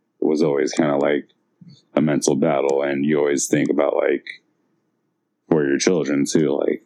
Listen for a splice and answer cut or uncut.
uncut